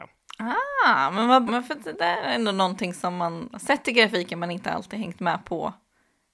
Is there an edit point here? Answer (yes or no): yes